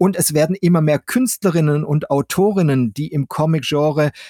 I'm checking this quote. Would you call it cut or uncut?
uncut